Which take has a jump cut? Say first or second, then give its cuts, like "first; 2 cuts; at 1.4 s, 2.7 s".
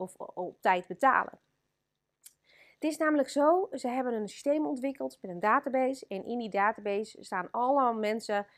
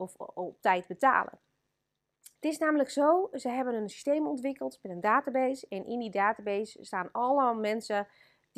second; 1 cut; at 2.4 s